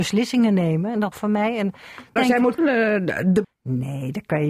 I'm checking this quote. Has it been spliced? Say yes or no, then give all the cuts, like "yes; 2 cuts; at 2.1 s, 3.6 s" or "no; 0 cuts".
yes; 4 cuts; at 1.1 s, 2.2 s, 2.6 s, 3.4 s